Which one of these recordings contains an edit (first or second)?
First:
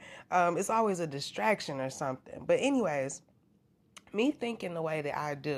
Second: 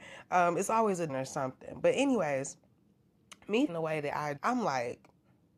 second